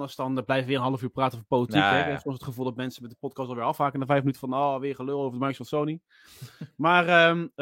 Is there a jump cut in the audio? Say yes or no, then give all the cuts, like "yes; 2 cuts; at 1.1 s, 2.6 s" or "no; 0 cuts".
no; 0 cuts